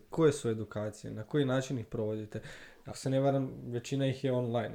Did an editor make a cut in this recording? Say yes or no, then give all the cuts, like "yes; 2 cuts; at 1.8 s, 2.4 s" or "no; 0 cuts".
yes; 1 cut; at 2.9 s